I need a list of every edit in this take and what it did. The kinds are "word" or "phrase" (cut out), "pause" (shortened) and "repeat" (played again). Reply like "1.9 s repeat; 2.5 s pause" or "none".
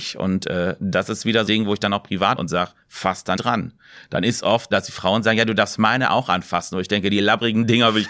1.5 s word; 2.4 s word; 2.8 s pause; 3.4 s word; 4.7 s word